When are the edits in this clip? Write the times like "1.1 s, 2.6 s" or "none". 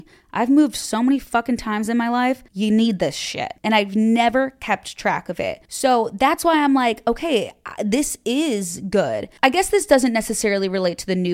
2.5 s, 3.6 s, 5.6 s

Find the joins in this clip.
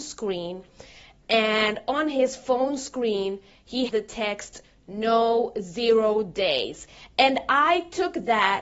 3.9 s

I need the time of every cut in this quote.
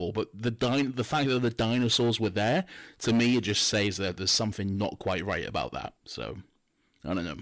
6.0 s

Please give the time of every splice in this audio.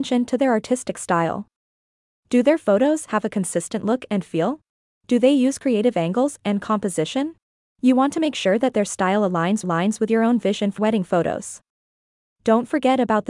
4.7 s, 7.4 s, 9.6 s, 10.8 s

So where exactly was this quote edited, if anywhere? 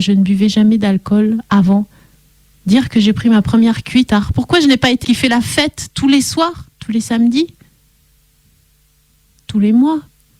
4.1 s, 5.0 s, 6.7 s

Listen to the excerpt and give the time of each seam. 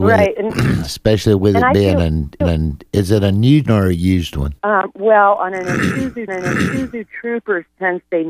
2.4 s, 3.7 s, 4.6 s, 6.3 s

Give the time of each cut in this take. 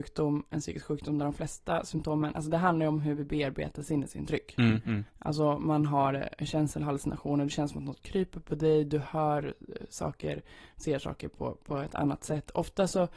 5.1 s

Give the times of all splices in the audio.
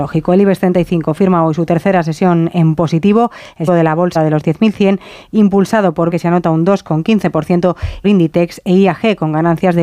3.7 s, 4.2 s, 6.1 s, 8.0 s

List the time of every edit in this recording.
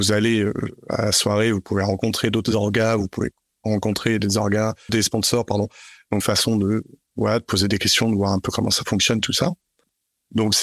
4.2 s, 4.9 s, 6.2 s

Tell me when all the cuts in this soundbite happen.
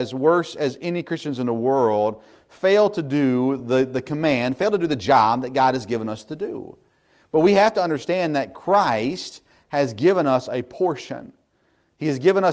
none

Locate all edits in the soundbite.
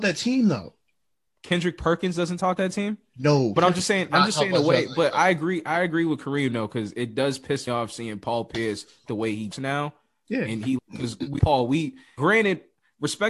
2.6 s, 3.6 s, 7.7 s, 9.1 s, 9.5 s, 10.8 s, 11.4 s, 12.2 s

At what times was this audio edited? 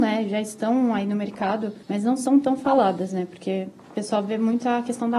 1.8 s

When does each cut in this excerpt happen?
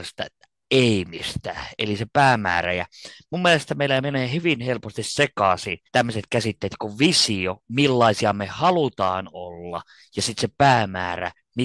5.9 s

